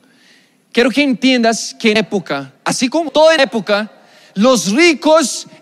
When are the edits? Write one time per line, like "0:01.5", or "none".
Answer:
0:02.0
0:02.6
0:03.1
0:03.4